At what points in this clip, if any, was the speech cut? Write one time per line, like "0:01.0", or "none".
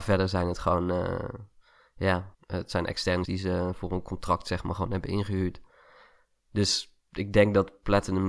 0:02.3
0:03.2
0:03.7